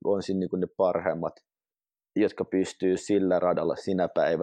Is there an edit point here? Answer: no; 0 cuts

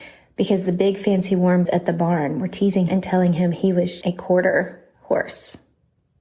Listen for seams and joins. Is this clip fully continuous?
no; 3 cuts; at 1.6 s, 2.9 s, 4.0 s

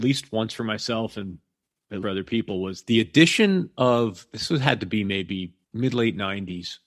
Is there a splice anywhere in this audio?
yes; 2 cuts; at 2.0 s, 5.6 s

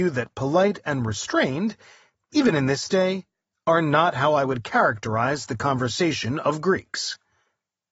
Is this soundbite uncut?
yes; 0 cuts

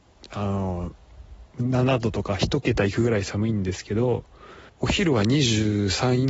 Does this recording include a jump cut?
yes; 1 cut; at 4.7 s

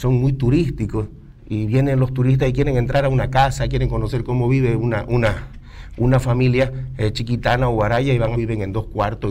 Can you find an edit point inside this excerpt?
yes; 2 cuts; at 1.4 s, 8.3 s

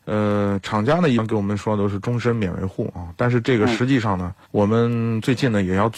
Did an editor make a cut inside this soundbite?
yes; 1 cut; at 4.4 s

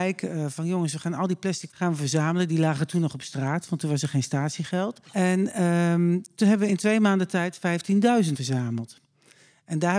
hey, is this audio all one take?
no; 3 cuts; at 1.7 s, 5.0 s, 8.3 s

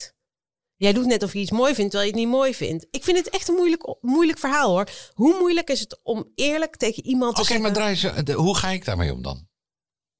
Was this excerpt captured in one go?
yes; 0 cuts

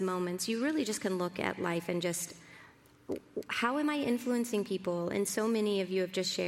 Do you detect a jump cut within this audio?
no; 0 cuts

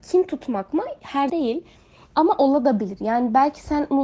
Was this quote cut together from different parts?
yes; 1 cut; at 1.3 s

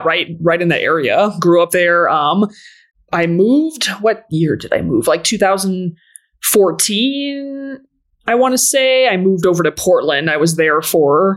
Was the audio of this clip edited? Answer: no; 0 cuts

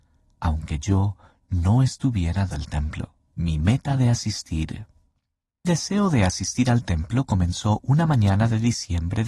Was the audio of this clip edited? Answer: yes; 3 cuts; at 2.5 s, 3.2 s, 5.6 s

